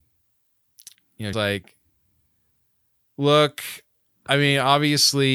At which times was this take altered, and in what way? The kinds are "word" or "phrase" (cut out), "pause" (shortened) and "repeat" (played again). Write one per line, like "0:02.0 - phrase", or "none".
0:00.9 - pause
0:01.3 - word

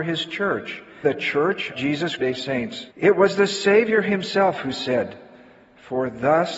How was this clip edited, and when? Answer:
0:01.0 - word
0:01.7 - word
0:02.2 - phrase
0:02.9 - pause

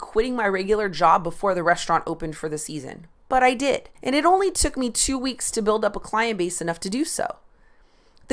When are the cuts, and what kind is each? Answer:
0:03.2 - pause
0:03.9 - pause

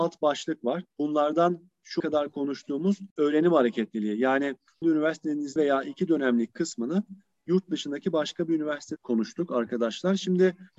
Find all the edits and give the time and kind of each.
0:00.9 - pause
0:02.0 - word
0:03.1 - pause
0:04.8 - word
0:05.6 - phrase
0:09.0 - word

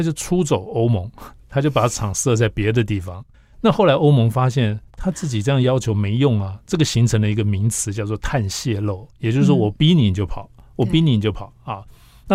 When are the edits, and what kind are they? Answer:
0:03.3 - pause
0:04.9 - pause

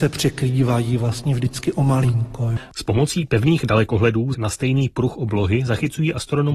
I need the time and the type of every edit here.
0:04.3 - word

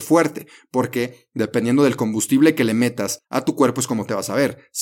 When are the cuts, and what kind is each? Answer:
0:03.2 - pause

